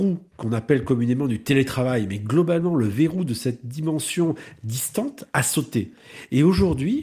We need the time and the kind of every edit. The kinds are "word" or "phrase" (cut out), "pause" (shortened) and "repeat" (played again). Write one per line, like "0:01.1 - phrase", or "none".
none